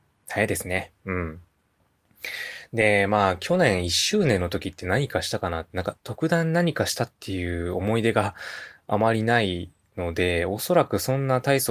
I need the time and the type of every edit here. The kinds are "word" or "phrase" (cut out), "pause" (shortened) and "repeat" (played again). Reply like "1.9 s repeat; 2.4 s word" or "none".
0.9 s pause; 6.0 s pause

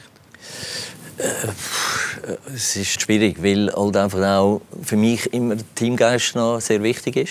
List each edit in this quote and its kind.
2.9 s word

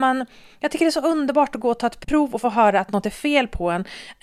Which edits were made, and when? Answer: none

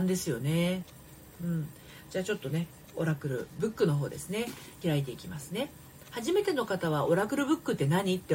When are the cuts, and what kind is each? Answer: 4.8 s phrase

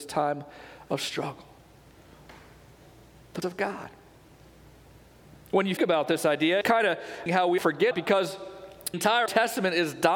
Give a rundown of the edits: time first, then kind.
3.4 s word; 5.8 s word; 6.6 s word; 7.3 s word; 7.6 s word; 7.9 s word; 8.9 s word; 9.3 s word

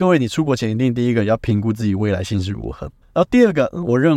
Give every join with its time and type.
3.0 s pause

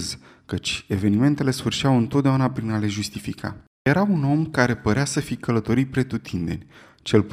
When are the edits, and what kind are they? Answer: none

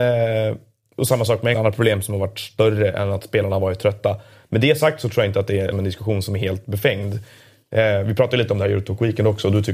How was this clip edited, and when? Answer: 1.5 s phrase; 5.7 s word

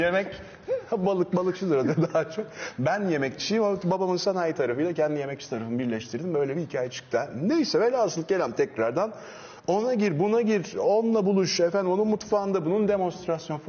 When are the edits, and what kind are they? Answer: none

